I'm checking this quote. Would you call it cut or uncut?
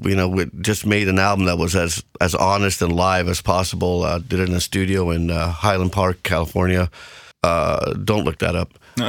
cut